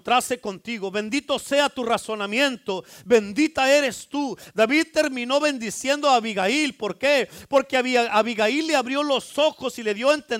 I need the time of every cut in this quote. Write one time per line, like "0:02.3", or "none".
none